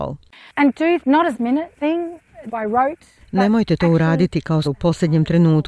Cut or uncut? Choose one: cut